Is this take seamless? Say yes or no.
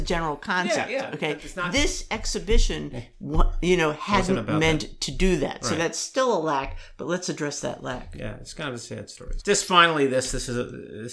no